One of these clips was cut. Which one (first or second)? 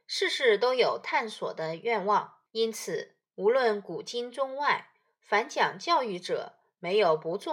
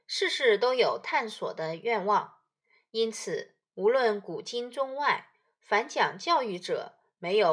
first